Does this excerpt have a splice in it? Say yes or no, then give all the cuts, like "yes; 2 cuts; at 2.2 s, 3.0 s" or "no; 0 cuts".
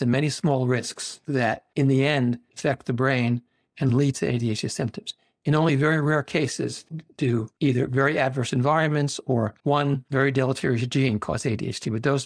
no; 0 cuts